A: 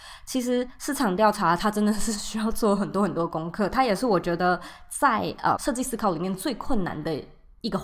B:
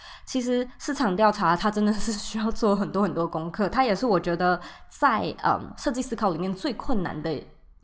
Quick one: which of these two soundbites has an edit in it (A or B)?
A